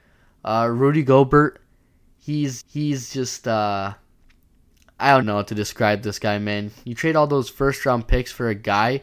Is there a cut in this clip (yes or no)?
yes